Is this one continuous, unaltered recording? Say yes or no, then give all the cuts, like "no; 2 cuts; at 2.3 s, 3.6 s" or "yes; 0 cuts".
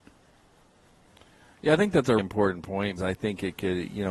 no; 2 cuts; at 2.2 s, 3.0 s